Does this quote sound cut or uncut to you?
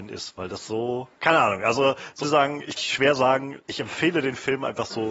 cut